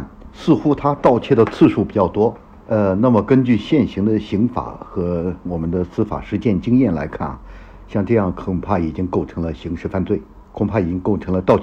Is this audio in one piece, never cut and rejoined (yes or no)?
yes